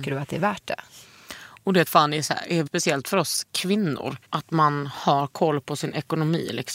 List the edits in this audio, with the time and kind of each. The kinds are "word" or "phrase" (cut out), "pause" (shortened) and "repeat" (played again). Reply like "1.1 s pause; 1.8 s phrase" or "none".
1.9 s phrase; 2.7 s word; 4.2 s pause